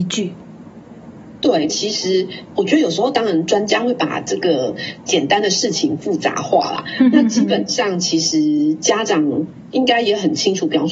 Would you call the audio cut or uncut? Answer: cut